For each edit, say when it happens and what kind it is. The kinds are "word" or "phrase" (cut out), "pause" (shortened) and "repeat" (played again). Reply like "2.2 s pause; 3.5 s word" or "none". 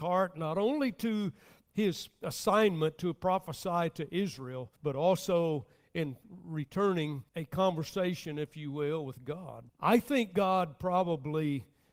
4.8 s pause; 7.3 s pause; 9.7 s pause